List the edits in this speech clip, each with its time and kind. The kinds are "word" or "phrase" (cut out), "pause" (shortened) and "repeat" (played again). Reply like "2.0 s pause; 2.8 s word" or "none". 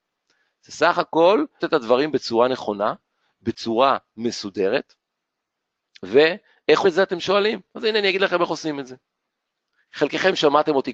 1.6 s word; 6.8 s word